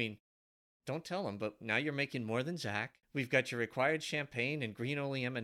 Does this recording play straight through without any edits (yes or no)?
no